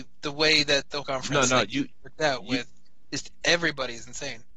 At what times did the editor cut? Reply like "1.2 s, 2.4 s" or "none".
1.0 s